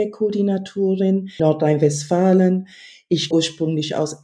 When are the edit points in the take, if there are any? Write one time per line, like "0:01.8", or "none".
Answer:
0:01.4
0:03.3